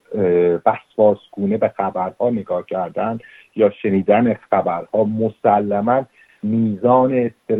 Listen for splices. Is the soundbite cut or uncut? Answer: uncut